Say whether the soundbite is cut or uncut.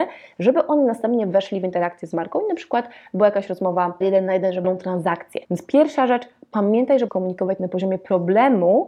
cut